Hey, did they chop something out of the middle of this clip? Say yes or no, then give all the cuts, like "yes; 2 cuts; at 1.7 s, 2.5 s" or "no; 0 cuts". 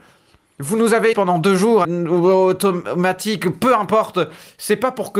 yes; 2 cuts; at 1.1 s, 1.8 s